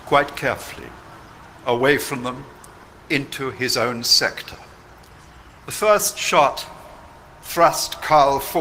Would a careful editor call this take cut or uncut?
cut